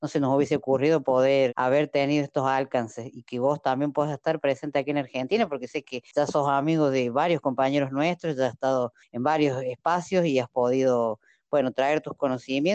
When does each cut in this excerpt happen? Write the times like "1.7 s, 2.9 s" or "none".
1.5 s